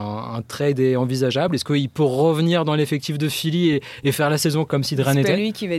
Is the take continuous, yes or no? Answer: yes